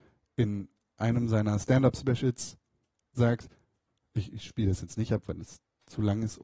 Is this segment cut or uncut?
uncut